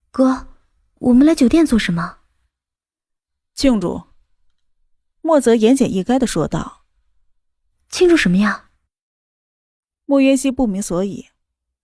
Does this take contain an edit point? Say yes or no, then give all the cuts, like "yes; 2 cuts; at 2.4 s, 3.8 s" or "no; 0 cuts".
no; 0 cuts